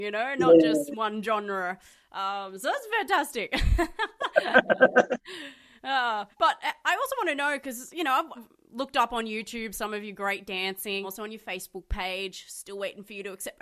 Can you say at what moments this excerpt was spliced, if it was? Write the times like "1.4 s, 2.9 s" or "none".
6.3 s, 8.3 s, 11.0 s